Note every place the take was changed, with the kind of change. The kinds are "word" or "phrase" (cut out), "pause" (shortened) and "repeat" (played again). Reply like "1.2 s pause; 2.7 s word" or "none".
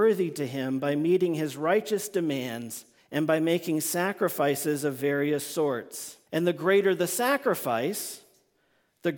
3.0 s pause; 6.3 s pause